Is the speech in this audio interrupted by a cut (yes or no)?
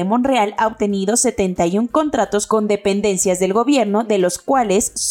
no